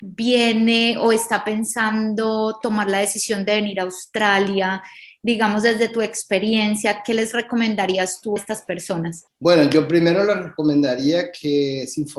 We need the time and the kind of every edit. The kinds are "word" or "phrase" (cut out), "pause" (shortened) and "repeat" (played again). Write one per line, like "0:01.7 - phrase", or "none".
0:08.4 - word